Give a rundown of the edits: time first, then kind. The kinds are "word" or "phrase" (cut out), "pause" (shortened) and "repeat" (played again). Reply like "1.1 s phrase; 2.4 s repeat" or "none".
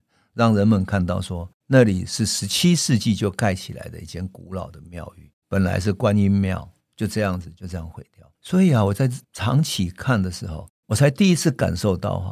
5.4 s pause; 6.8 s pause; 8.3 s pause; 9.2 s pause